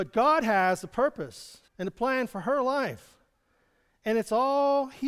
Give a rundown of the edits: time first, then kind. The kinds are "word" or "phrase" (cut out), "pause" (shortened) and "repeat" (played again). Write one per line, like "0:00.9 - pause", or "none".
0:01.7 - pause

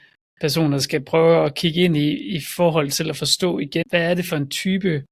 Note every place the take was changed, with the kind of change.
0:03.8 - word

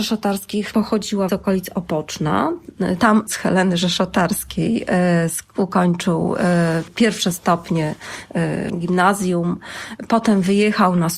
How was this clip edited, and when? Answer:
0:01.3 - word
0:03.3 - word
0:06.9 - word
0:08.7 - word

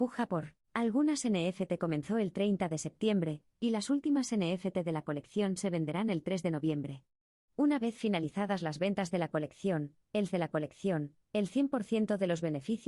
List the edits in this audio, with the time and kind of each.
0:10.3 - repeat

